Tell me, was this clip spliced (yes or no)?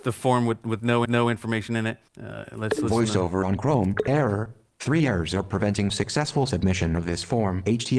yes